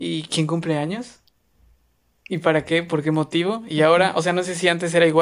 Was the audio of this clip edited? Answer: no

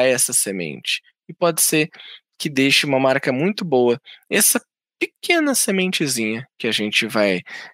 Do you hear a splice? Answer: no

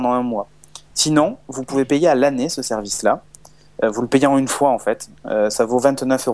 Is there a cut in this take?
no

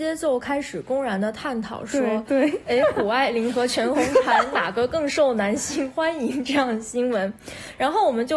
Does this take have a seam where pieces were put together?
no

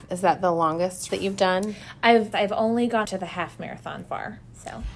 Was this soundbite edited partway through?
yes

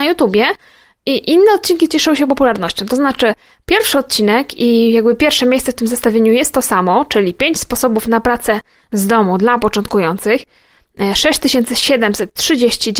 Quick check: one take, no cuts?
yes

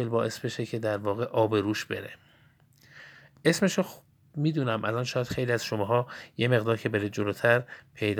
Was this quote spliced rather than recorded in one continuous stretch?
no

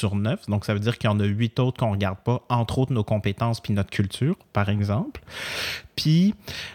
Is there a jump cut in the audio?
no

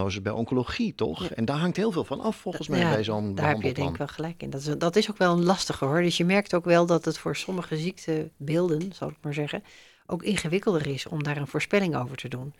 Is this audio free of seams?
yes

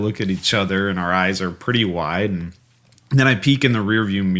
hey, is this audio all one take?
yes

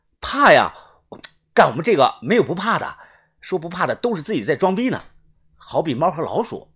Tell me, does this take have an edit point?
no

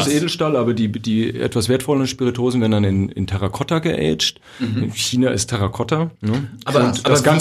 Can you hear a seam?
yes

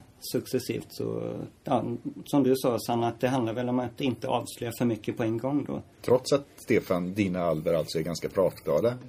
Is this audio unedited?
no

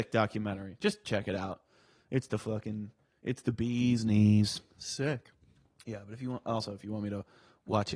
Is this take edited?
no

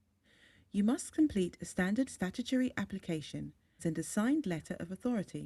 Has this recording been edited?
yes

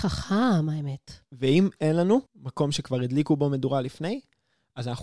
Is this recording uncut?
no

